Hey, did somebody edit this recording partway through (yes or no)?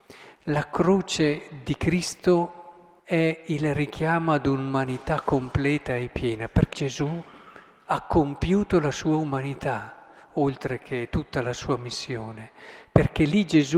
yes